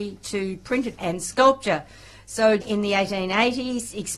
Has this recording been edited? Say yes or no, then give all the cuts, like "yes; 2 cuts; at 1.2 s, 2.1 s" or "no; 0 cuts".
yes; 2 cuts; at 1.0 s, 2.6 s